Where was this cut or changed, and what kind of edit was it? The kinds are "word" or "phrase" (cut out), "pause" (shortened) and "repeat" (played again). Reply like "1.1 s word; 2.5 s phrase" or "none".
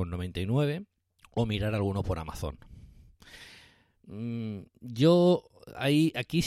1.1 s pause